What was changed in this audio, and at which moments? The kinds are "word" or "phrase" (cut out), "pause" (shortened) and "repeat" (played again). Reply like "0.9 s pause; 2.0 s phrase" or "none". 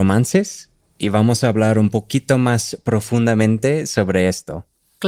none